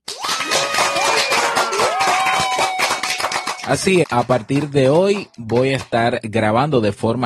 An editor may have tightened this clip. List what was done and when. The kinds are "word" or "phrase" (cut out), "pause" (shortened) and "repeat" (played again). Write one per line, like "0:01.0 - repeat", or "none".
0:04.0 - word